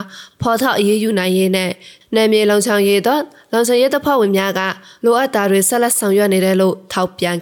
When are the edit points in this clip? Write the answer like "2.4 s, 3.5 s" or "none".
none